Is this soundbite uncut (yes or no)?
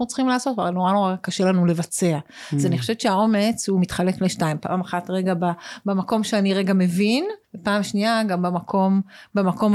no